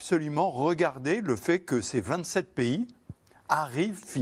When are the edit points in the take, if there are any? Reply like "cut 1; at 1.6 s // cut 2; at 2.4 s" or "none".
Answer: none

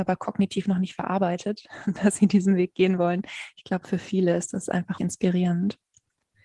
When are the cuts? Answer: cut 1; at 5.0 s

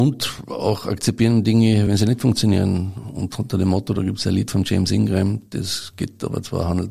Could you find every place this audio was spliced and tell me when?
none

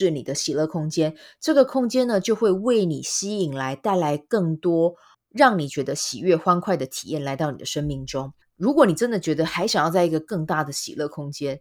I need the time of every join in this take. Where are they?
cut 1; at 5.1 s // cut 2; at 8.4 s

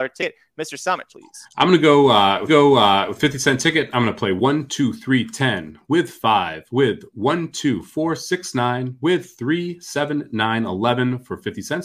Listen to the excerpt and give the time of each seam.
cut 1; at 1.1 s // cut 2; at 1.4 s // cut 3; at 2.5 s

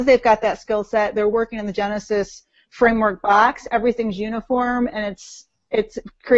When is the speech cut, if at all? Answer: none

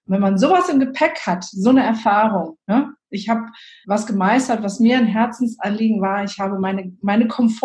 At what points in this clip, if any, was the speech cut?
cut 1; at 3.8 s

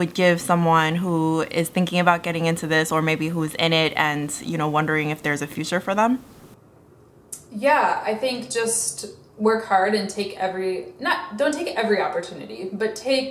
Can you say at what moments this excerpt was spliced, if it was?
none

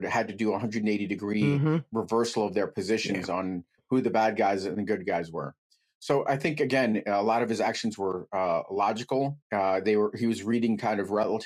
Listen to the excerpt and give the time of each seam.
cut 1; at 9.4 s

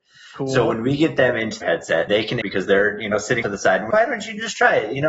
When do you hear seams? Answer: cut 1; at 1.6 s // cut 2; at 2.1 s // cut 3; at 2.4 s // cut 4; at 3.4 s // cut 5; at 3.9 s

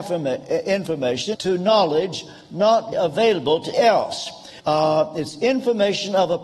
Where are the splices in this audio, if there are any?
cut 1; at 1.3 s // cut 2; at 2.9 s // cut 3; at 3.7 s // cut 4; at 4.6 s

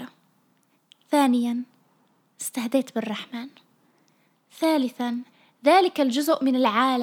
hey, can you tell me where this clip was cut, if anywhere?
cut 1; at 5.3 s

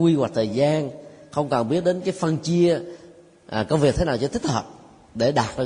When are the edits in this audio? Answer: none

